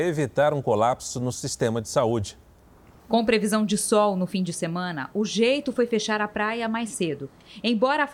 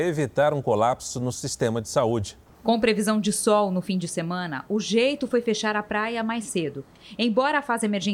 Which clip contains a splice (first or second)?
second